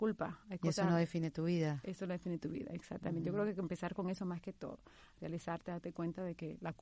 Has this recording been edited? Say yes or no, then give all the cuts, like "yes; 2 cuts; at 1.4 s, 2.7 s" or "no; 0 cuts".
no; 0 cuts